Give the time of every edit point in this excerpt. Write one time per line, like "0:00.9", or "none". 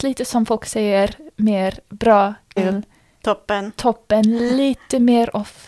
0:02.6